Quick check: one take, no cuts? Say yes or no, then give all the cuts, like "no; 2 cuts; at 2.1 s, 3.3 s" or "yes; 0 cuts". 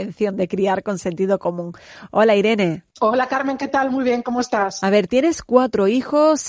yes; 0 cuts